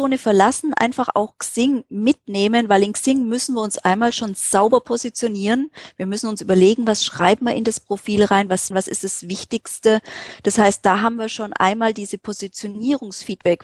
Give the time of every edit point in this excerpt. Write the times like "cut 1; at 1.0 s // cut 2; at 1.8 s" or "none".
cut 1; at 8.7 s